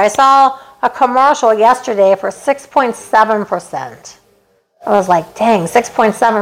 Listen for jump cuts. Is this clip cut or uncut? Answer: uncut